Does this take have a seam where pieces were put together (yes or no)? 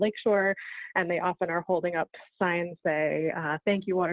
yes